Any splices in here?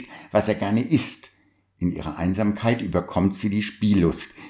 no; 0 cuts

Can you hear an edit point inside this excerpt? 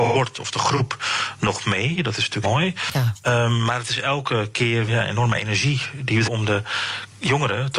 yes; 3 cuts; at 2.4 s, 4.9 s, 6.2 s

